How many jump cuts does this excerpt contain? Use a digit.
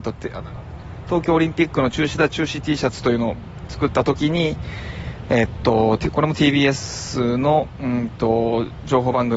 0